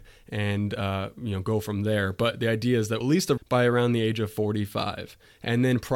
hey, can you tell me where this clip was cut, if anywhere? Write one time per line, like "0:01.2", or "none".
0:03.0
0:03.4